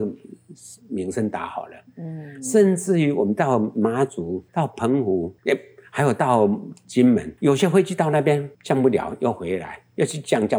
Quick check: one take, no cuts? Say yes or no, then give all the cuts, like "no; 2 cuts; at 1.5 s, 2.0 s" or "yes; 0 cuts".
no; 4 cuts; at 4.5 s, 5.4 s, 7.4 s, 8.5 s